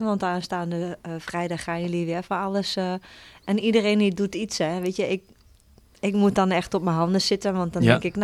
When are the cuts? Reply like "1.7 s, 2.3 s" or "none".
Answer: none

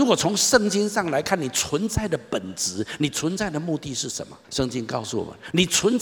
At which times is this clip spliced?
4.4 s

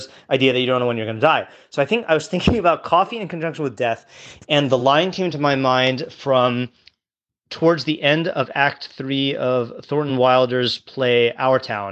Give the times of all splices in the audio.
none

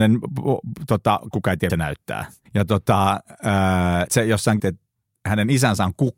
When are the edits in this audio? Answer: 1.3 s, 1.7 s, 2.5 s, 4.1 s, 4.6 s

